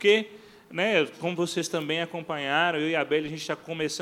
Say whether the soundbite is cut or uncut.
uncut